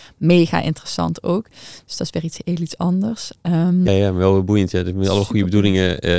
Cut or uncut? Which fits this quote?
cut